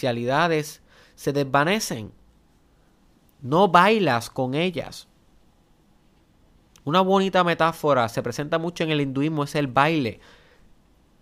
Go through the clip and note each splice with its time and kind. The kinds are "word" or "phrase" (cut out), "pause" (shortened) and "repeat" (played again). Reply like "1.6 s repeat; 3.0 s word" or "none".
none